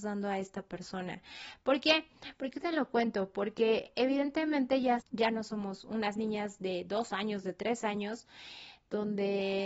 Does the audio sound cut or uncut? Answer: cut